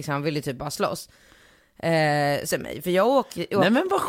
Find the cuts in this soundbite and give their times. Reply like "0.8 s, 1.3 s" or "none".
2.5 s